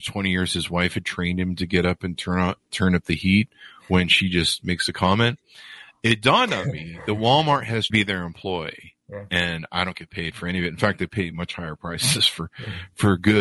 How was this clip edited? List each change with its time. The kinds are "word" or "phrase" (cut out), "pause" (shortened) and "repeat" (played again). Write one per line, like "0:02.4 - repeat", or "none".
0:07.9 - phrase